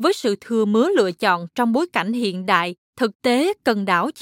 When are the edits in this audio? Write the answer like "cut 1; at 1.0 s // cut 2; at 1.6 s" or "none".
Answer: cut 1; at 2.8 s